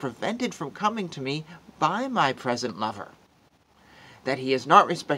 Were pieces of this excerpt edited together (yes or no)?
no